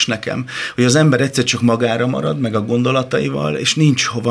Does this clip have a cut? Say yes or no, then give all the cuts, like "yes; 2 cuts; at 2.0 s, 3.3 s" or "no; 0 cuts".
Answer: no; 0 cuts